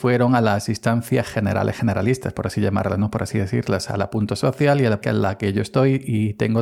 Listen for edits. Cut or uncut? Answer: cut